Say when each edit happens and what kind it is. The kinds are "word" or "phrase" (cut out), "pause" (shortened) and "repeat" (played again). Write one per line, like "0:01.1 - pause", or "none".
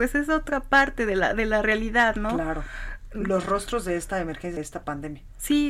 0:04.6 - word